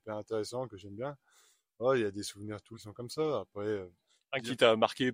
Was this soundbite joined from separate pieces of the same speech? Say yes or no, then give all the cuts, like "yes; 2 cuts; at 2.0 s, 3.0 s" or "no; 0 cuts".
yes; 1 cut; at 2.7 s